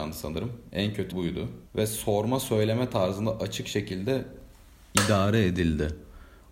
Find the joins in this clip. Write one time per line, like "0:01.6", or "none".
0:01.1
0:01.7